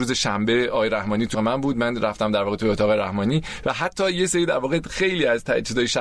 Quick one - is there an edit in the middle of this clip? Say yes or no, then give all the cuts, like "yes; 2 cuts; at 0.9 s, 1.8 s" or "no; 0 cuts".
yes; 1 cut; at 1.3 s